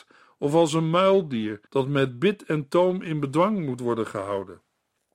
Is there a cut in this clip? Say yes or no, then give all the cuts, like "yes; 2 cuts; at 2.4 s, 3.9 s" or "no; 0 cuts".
yes; 1 cut; at 1.7 s